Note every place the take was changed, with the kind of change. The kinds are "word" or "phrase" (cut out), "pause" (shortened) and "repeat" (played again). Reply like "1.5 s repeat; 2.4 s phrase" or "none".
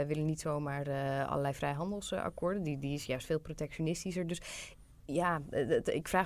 none